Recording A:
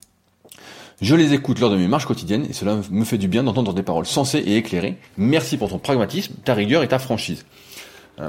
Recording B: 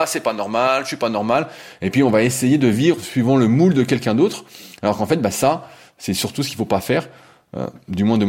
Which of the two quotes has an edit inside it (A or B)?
A